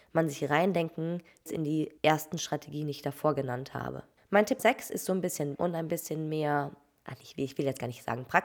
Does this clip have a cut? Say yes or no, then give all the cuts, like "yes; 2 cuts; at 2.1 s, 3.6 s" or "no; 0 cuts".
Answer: yes; 5 cuts; at 1.5 s, 2.0 s, 4.2 s, 4.6 s, 5.6 s